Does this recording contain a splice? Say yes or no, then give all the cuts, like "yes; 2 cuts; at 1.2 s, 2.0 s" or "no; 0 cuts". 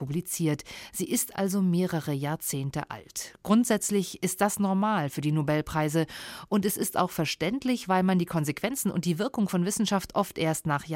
no; 0 cuts